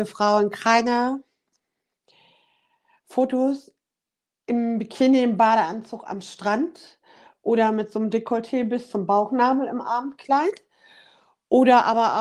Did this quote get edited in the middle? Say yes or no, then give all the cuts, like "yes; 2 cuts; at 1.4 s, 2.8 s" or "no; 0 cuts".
no; 0 cuts